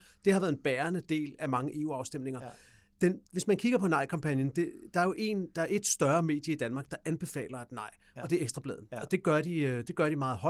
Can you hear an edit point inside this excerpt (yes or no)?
no